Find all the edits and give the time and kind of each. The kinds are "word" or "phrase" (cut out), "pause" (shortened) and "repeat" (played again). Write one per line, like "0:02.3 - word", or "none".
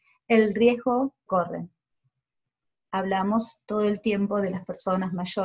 0:01.3 - word